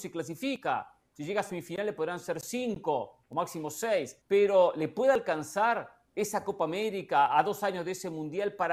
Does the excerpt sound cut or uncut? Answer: cut